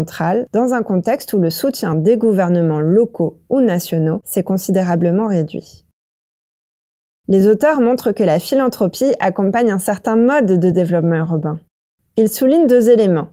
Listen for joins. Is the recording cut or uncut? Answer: uncut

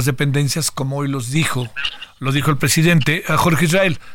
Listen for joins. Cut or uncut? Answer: uncut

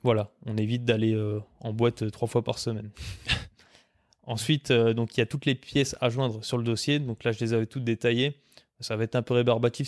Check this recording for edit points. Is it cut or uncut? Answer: uncut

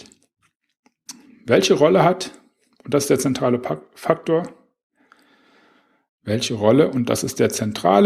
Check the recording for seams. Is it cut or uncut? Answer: uncut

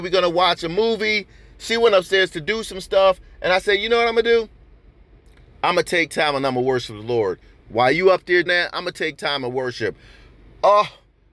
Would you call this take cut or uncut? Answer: cut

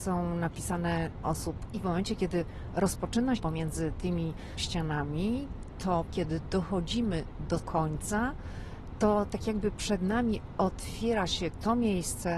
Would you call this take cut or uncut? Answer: cut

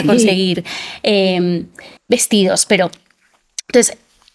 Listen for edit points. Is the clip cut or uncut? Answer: cut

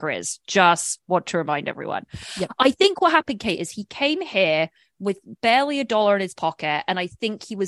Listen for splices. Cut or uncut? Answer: uncut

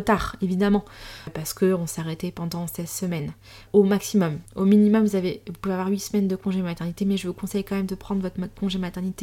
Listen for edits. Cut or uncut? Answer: cut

